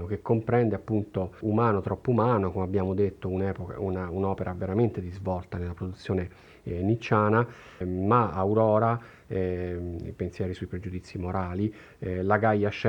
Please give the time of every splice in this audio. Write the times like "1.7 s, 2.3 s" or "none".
1.4 s, 7.8 s

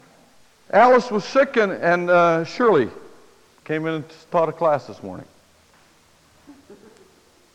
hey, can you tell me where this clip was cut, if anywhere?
none

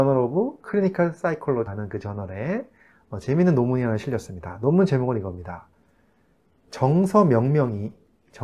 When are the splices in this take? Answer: 1.7 s

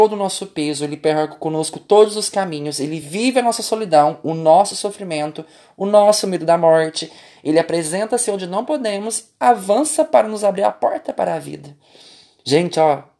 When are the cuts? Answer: none

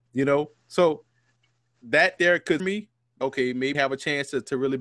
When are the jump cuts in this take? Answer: 2.2 s, 2.6 s, 3.2 s, 3.7 s

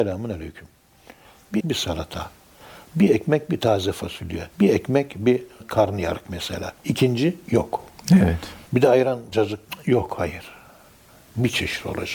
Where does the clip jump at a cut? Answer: 1.6 s, 4.5 s, 5.6 s, 6.8 s, 8.7 s, 9.3 s

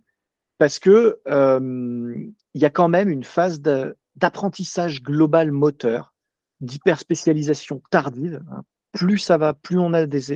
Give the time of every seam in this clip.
none

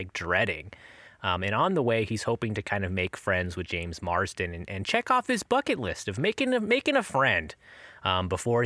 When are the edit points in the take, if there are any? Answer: none

